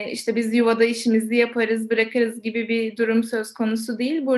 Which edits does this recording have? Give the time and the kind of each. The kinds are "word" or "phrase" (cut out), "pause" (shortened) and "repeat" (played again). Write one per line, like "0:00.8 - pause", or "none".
none